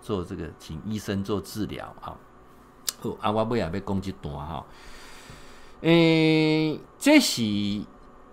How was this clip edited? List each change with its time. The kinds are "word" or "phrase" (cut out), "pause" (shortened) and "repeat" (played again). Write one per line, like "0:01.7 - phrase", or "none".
0:06.9 - pause